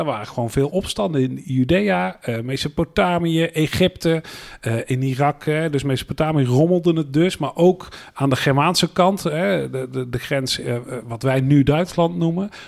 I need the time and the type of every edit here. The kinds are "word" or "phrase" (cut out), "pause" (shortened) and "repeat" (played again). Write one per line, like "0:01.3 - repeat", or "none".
none